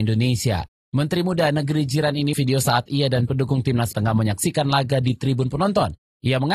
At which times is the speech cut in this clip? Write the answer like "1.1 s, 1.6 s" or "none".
2.3 s, 3.9 s